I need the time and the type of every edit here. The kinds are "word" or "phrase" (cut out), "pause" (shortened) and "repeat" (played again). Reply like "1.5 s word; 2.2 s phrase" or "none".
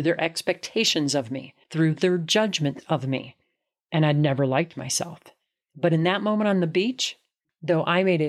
1.6 s pause